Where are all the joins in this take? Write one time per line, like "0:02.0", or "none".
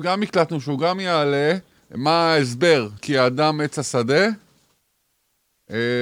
0:01.8
0:03.0

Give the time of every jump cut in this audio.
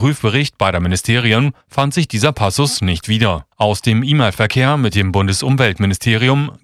0:01.6
0:03.5

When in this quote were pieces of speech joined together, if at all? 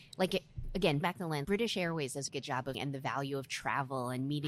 0:01.0
0:01.4
0:02.3
0:02.7

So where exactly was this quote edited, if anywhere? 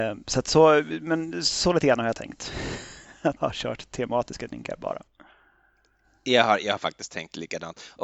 0:03.4

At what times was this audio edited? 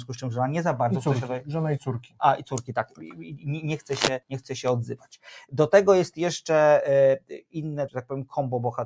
0:04.2
0:07.9

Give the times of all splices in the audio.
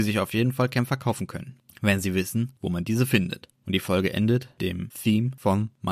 0:04.6

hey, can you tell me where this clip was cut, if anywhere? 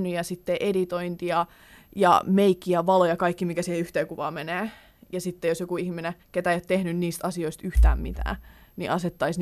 0:06.2

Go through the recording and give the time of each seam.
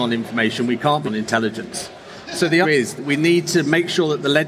0:01.1
0:02.6
0:03.0

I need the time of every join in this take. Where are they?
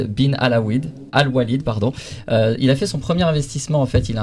0:01.1

